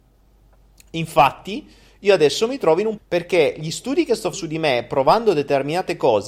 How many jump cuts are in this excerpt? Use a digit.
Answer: 2